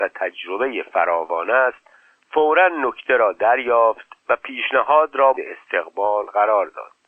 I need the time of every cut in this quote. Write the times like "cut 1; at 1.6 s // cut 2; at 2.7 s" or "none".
cut 1; at 5.3 s